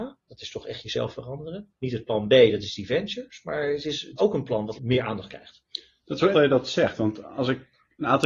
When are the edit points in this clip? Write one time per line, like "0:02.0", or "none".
0:04.2
0:04.7
0:06.3